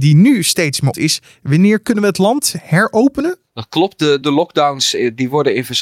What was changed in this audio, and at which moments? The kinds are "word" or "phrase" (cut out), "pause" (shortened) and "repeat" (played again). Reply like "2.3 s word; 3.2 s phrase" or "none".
0.9 s word; 4.2 s word

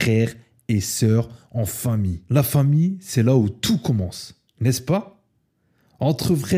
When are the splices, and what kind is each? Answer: none

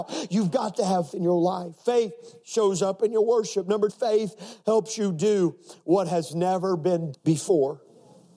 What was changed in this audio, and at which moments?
1.1 s word; 3.9 s word; 7.1 s word

